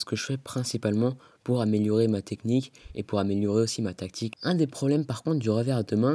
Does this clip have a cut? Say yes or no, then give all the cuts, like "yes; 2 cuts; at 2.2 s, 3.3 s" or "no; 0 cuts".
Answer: no; 0 cuts